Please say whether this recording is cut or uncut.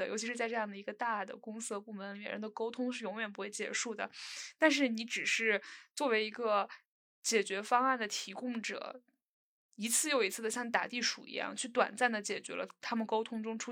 uncut